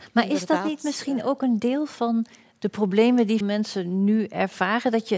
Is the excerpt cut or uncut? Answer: cut